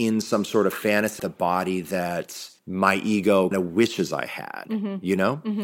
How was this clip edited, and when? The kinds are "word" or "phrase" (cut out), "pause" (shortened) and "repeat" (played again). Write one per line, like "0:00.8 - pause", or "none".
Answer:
0:01.2 - phrase
0:02.6 - pause
0:03.5 - word

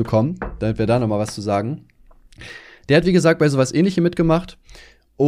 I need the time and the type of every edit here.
none

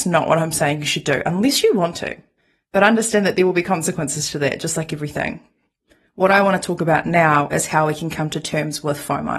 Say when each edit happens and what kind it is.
none

